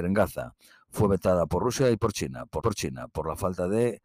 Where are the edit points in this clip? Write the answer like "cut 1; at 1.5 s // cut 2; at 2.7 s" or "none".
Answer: cut 1; at 2.6 s